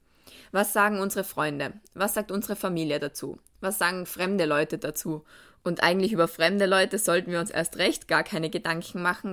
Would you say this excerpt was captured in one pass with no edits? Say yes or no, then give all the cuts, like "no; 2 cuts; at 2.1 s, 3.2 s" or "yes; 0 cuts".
yes; 0 cuts